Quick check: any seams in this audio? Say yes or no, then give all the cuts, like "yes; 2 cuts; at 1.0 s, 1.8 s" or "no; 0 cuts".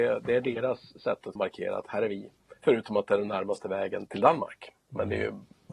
yes; 2 cuts; at 1.4 s, 4.1 s